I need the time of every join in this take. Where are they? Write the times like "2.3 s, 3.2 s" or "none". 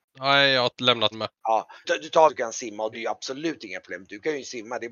1.1 s, 1.8 s, 2.3 s, 2.9 s